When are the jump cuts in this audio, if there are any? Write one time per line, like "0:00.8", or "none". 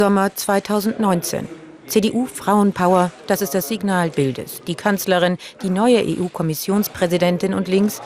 0:04.1